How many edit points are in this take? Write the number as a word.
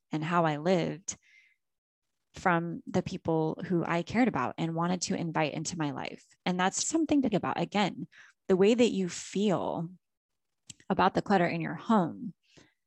two